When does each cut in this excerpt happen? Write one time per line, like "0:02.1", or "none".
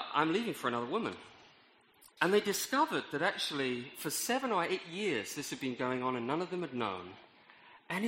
0:02.1